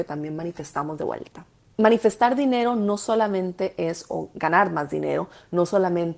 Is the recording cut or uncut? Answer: cut